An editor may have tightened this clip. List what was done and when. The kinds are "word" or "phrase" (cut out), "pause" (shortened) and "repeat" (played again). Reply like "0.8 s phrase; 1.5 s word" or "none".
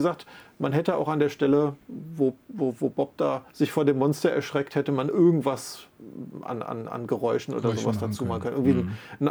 3.5 s pause